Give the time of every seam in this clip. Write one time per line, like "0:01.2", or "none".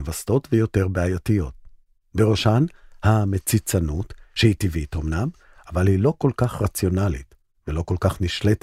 none